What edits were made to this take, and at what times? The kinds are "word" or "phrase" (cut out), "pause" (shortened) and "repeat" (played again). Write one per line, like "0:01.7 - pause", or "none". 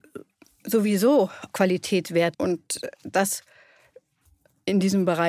0:01.5 - word
0:02.3 - word

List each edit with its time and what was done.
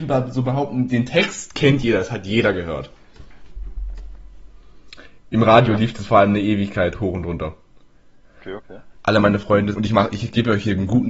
0:09.7 - word

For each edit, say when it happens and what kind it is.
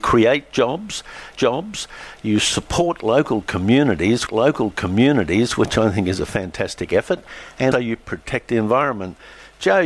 0:01.4 - repeat
0:04.3 - repeat
0:07.7 - word

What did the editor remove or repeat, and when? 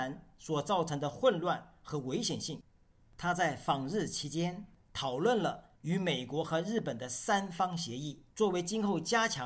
0:05.8 - pause
0:08.3 - pause

